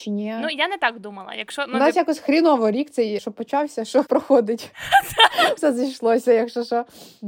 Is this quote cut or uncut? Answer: cut